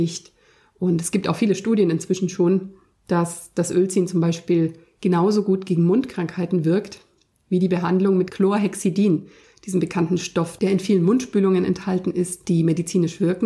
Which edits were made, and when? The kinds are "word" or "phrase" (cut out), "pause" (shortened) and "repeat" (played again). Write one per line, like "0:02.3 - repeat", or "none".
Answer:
none